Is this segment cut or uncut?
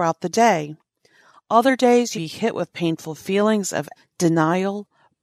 cut